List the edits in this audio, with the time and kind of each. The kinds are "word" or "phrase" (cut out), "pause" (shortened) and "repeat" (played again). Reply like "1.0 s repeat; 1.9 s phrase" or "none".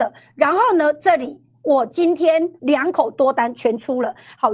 2.6 s pause